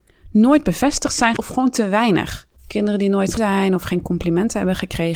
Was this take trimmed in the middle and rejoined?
yes; 3 cuts; at 1.4 s, 2.6 s, 3.4 s

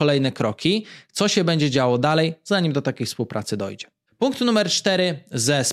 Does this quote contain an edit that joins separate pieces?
no; 0 cuts

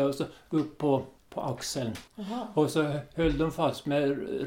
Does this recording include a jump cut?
yes; 2 cuts; at 1.2 s, 2.1 s

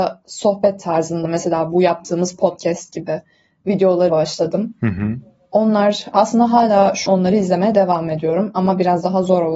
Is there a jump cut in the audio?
yes; 3 cuts; at 1.2 s, 4.1 s, 7.1 s

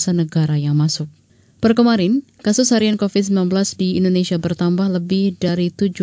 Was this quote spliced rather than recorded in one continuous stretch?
no; 0 cuts

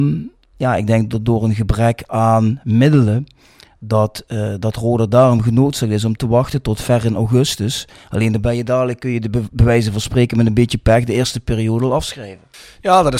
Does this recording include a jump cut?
no; 0 cuts

